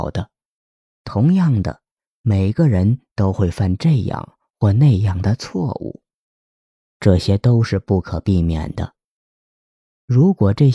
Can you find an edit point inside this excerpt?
no; 0 cuts

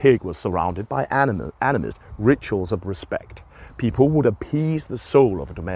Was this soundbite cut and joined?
no; 0 cuts

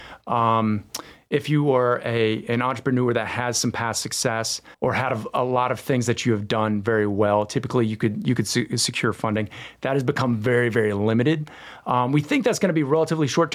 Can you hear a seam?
yes; 1 cut; at 4.7 s

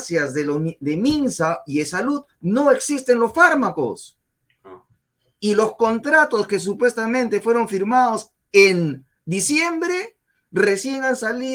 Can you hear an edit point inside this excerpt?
no; 0 cuts

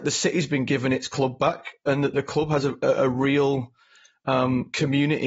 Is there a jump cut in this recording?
no; 0 cuts

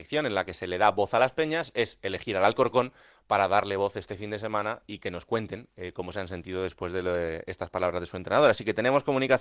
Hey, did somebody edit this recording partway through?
no; 0 cuts

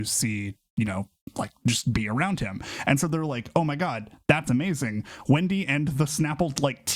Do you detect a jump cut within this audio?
no; 0 cuts

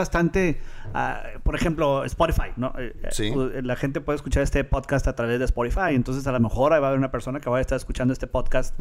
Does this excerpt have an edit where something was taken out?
no; 0 cuts

